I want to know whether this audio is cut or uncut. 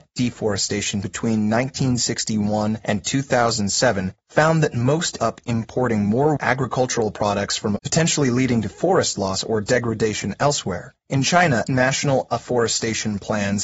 cut